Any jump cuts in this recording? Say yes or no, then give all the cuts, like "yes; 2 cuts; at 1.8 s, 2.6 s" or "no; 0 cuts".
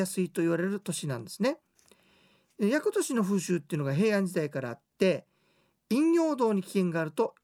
no; 0 cuts